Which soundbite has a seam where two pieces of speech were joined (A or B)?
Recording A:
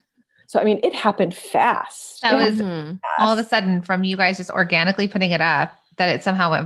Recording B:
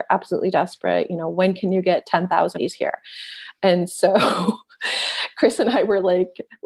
B